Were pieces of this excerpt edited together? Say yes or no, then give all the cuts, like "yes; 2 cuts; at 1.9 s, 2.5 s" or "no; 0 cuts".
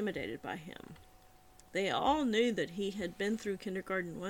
no; 0 cuts